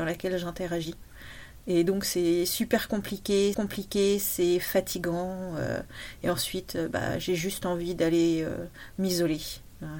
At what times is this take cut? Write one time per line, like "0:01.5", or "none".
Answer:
0:03.5

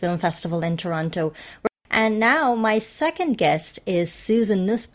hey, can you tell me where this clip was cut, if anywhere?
none

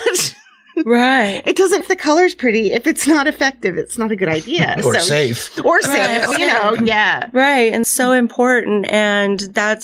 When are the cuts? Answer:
0:01.8
0:06.3
0:06.8
0:07.8

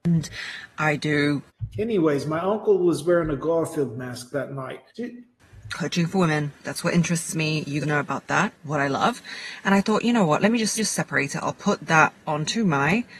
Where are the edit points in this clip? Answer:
0:04.9
0:07.8
0:10.8

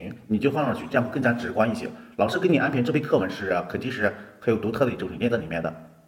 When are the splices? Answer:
none

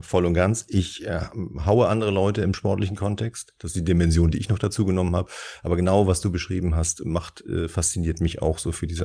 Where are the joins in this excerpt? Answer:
none

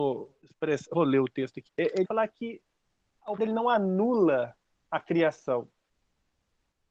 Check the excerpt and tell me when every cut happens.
0:00.9
0:01.7
0:02.0
0:03.4

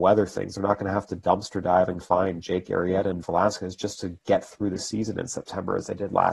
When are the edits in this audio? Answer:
0:02.0
0:03.2

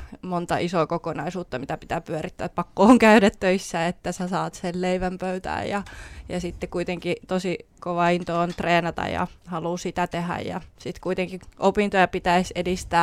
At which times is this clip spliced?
0:09.4

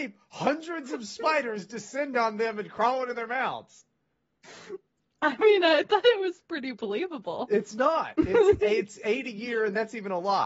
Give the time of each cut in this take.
none

